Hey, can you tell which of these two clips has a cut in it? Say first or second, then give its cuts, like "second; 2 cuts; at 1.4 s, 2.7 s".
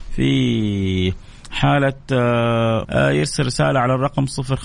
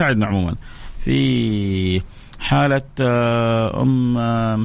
first; 1 cut; at 2.8 s